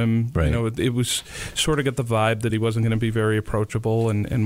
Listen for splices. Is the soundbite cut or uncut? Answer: uncut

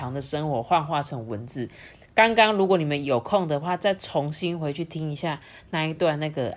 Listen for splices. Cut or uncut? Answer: uncut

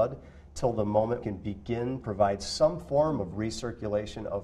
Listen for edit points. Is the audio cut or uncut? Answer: cut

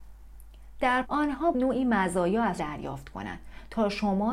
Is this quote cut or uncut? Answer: cut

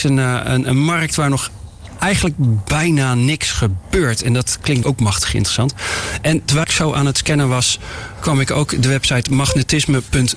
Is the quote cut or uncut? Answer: cut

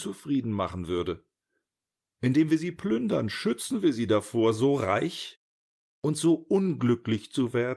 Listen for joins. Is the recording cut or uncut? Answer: uncut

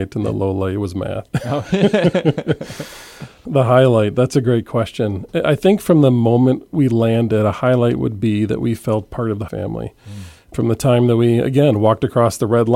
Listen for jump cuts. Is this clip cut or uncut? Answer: cut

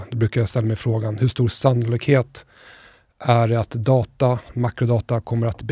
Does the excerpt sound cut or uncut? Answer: uncut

